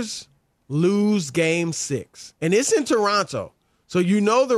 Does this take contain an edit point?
no; 0 cuts

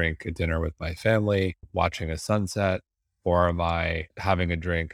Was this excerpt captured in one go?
yes; 0 cuts

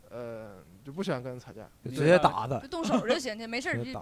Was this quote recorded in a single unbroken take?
no; 1 cut; at 1.8 s

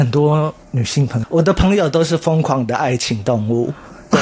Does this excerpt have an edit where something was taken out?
yes; 1 cut; at 1.2 s

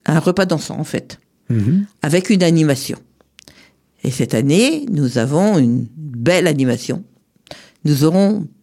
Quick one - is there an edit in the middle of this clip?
no; 0 cuts

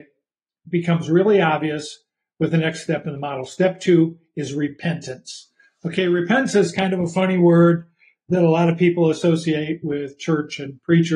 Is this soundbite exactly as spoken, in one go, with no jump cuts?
yes; 0 cuts

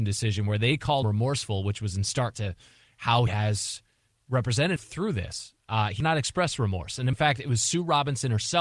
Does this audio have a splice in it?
yes; 6 cuts; at 1.0 s, 2.3 s, 3.3 s, 4.8 s, 6.0 s, 7.1 s

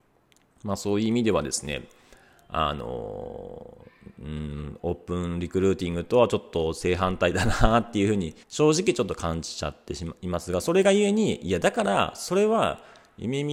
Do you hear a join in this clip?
yes; 1 cut; at 8.4 s

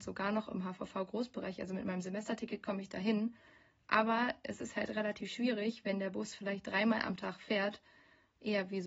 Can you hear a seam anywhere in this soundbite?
no; 0 cuts

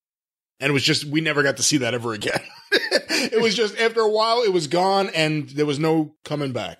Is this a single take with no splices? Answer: yes; 0 cuts

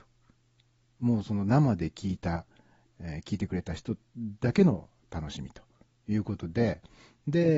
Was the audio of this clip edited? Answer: no; 0 cuts

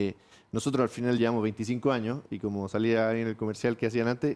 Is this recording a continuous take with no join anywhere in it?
yes; 0 cuts

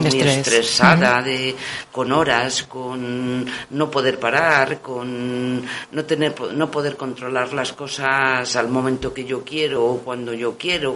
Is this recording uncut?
yes; 0 cuts

